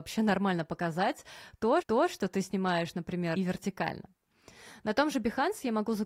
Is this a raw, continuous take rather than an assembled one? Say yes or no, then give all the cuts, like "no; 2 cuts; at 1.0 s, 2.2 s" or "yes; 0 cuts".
no; 2 cuts; at 1.8 s, 3.4 s